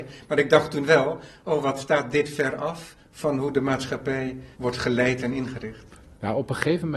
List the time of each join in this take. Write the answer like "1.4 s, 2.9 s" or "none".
4.5 s